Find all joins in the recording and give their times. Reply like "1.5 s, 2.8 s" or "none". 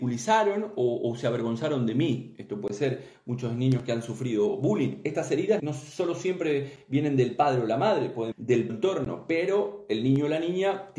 5.6 s, 8.3 s, 8.7 s